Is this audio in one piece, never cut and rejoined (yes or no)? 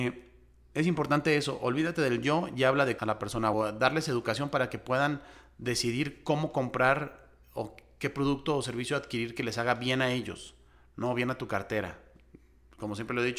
no